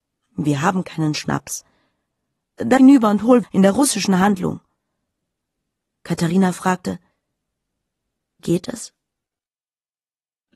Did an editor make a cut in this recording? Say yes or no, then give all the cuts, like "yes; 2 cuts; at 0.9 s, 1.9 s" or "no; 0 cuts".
yes; 3 cuts; at 2.8 s, 3.4 s, 8.4 s